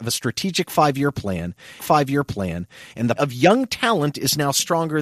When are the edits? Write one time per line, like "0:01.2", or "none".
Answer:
0:01.8
0:03.2

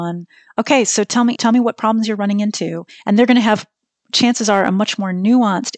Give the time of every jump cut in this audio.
0:01.3

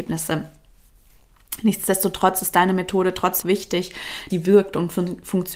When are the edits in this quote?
0:03.4
0:04.3

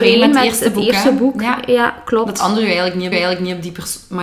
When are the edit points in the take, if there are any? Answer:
0:03.1

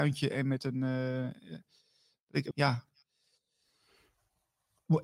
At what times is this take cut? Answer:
0:02.5

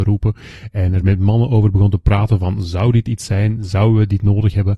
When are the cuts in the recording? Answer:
none

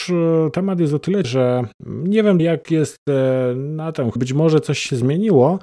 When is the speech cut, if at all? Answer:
0:01.2
0:02.4
0:04.2

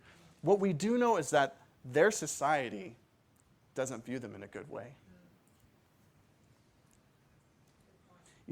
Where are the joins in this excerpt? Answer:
none

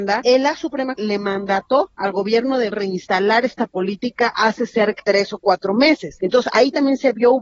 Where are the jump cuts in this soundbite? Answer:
0:01.0
0:02.7
0:05.0

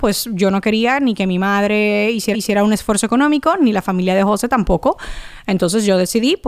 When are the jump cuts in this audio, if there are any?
0:02.3

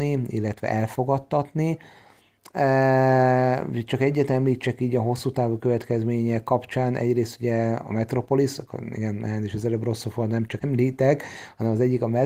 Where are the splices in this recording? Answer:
0:10.6

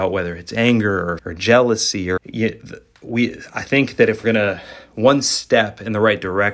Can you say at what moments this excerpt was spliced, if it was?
0:01.2
0:02.2
0:04.2

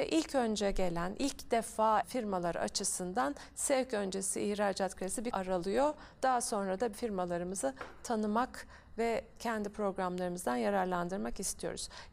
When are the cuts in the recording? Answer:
0:02.0
0:05.3
0:06.9

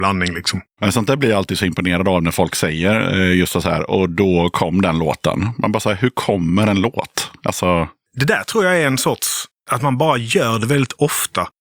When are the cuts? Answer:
none

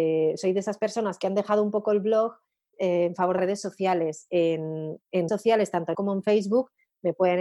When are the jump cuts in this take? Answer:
0:02.7
0:03.4
0:05.3
0:05.9

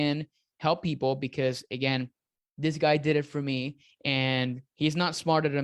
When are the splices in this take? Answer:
none

